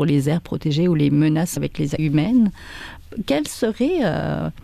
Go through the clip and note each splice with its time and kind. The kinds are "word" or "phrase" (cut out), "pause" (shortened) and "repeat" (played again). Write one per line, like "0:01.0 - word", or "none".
0:01.6 - phrase
0:02.0 - word